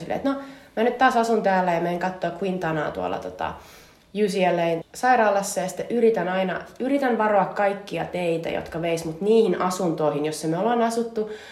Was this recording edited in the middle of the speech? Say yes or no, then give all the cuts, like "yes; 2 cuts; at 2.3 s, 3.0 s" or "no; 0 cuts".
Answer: yes; 1 cut; at 4.8 s